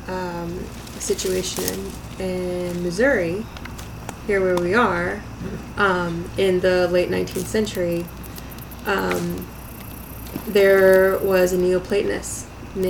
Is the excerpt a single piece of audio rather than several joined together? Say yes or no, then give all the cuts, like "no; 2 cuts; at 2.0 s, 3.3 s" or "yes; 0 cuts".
yes; 0 cuts